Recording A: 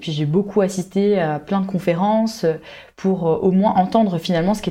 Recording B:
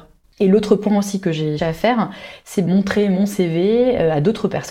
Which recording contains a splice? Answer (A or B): B